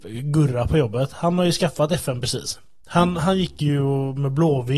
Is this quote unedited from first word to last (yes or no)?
yes